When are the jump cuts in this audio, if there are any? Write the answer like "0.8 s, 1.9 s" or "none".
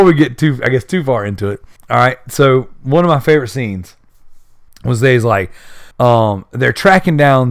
1.8 s, 4.7 s, 5.9 s